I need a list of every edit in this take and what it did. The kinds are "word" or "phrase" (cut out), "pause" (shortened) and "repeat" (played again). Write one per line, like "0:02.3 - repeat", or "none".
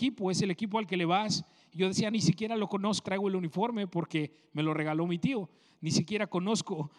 0:02.1 - word
0:03.0 - word